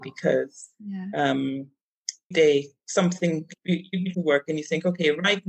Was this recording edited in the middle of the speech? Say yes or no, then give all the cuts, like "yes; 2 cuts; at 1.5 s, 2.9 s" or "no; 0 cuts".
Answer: yes; 3 cuts; at 2.3 s, 3.6 s, 4.1 s